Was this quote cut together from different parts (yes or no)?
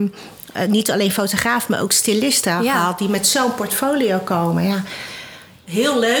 no